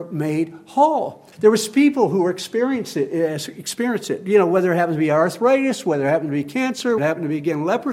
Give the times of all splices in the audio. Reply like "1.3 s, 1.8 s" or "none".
1.3 s, 7.0 s